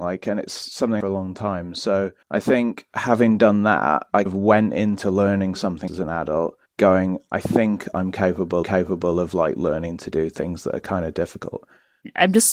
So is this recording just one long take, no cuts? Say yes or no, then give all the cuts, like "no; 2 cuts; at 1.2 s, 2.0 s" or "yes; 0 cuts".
no; 6 cuts; at 1.0 s, 2.2 s, 4.3 s, 5.9 s, 6.7 s, 8.6 s